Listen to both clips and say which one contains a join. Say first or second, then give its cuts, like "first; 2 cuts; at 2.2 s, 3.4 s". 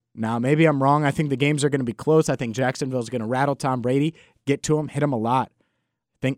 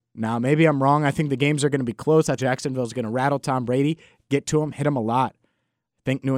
second; 1 cut; at 2.4 s